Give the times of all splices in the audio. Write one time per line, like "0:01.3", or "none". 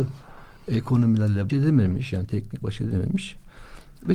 0:01.5
0:02.6